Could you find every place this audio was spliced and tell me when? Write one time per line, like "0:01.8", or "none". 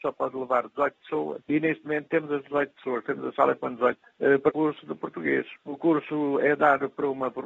0:03.6
0:04.5